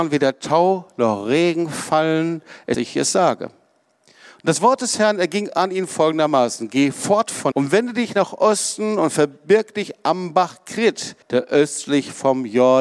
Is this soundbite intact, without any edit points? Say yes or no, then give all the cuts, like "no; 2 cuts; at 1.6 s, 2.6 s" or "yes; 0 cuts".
no; 3 cuts; at 2.7 s, 7.5 s, 11.2 s